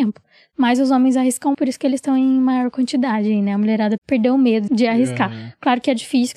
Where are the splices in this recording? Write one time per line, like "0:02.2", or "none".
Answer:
0:01.5
0:04.0
0:04.7